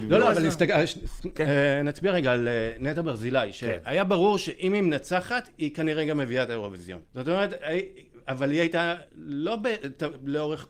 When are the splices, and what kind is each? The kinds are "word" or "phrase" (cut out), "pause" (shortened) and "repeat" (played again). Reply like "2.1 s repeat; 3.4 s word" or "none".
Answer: 7.0 s pause; 9.1 s pause